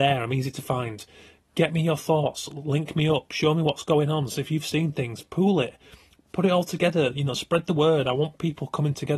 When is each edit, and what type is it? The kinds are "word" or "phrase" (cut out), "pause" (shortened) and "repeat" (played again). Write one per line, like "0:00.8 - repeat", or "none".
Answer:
none